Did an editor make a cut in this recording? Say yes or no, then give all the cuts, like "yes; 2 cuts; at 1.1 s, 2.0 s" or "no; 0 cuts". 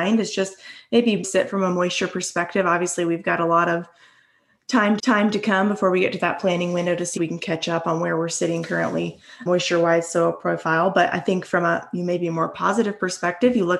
yes; 4 cuts; at 1.2 s, 5.0 s, 7.2 s, 9.5 s